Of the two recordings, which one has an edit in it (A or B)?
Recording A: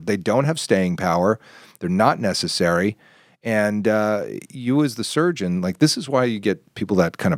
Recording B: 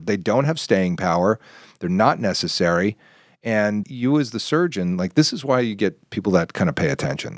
B